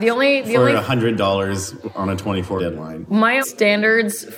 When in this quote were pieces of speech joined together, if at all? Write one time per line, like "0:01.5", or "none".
0:02.6
0:03.4